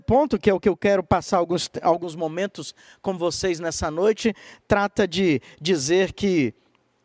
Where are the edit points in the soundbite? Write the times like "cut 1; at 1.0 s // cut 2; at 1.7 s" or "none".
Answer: none

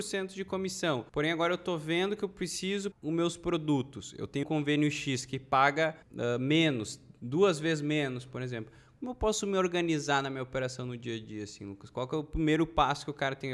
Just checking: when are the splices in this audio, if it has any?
cut 1; at 1.1 s // cut 2; at 2.9 s // cut 3; at 4.4 s // cut 4; at 6.0 s

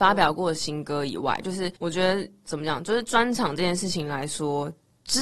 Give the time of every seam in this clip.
cut 1; at 1.8 s

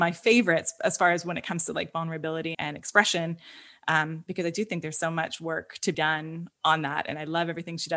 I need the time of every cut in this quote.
cut 1; at 2.5 s // cut 2; at 5.9 s

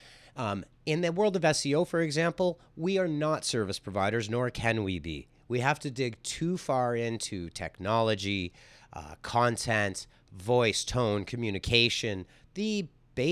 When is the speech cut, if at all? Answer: none

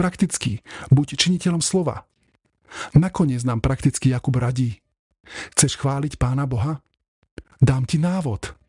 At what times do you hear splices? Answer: none

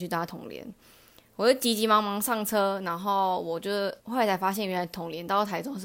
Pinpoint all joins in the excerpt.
cut 1; at 4.0 s

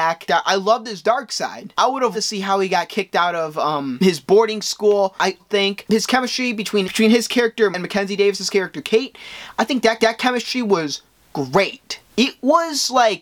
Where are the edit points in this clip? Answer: cut 1; at 2.1 s // cut 2; at 5.4 s // cut 3; at 7.7 s // cut 4; at 10.0 s // cut 5; at 12.1 s

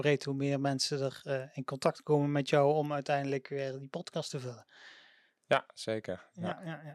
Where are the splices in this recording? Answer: none

